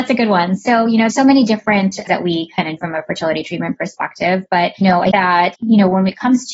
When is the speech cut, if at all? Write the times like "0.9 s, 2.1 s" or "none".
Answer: 1.1 s, 2.1 s, 2.8 s, 4.8 s, 5.1 s, 5.5 s